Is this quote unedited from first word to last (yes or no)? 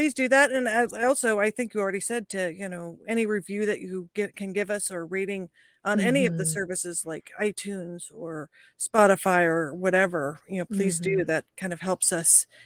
yes